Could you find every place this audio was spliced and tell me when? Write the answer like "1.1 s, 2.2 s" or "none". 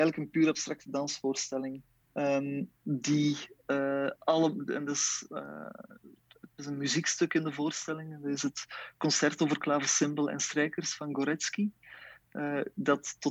2.0 s, 6.6 s